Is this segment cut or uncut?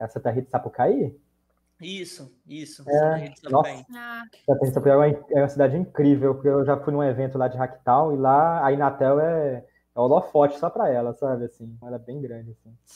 cut